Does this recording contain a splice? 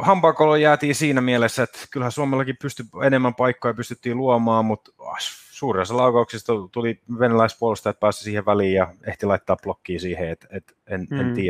no; 0 cuts

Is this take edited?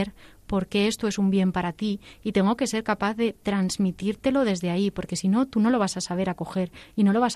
no; 0 cuts

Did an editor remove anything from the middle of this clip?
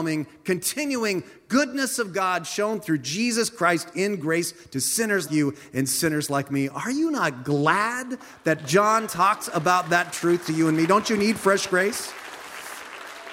yes; 1 cut; at 5.3 s

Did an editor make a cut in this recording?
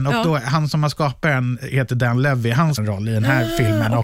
yes; 1 cut; at 2.8 s

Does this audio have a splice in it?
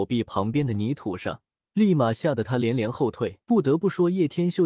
yes; 2 cuts; at 1.6 s, 3.4 s

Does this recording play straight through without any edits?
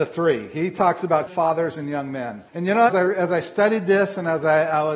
no; 3 cuts; at 1.3 s, 2.5 s, 2.9 s

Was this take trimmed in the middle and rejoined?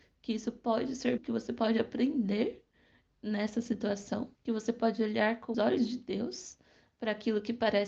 yes; 3 cuts; at 1.2 s, 4.3 s, 5.5 s

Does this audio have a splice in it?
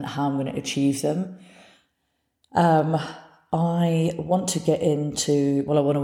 no; 0 cuts

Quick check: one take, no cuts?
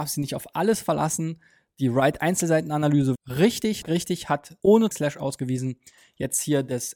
no; 4 cuts; at 3.1 s, 3.8 s, 4.6 s, 4.9 s

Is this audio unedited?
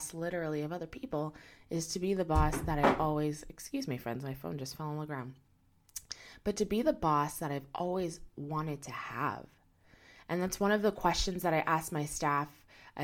yes; 0 cuts

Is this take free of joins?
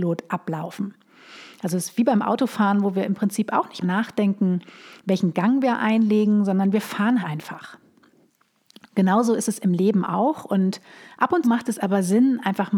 no; 3 cuts; at 3.8 s, 7.2 s, 11.4 s

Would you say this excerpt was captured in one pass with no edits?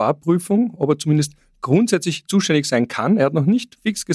yes; 0 cuts

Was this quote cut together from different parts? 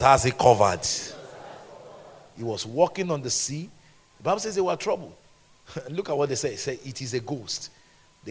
no; 0 cuts

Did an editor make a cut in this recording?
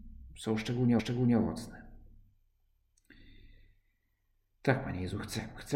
yes; 1 cut; at 1.0 s

